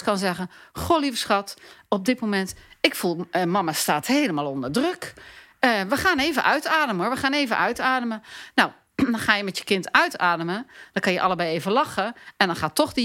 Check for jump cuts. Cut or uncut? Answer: uncut